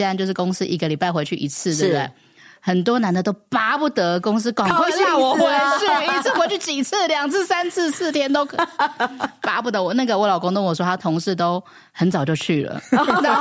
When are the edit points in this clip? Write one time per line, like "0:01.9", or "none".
none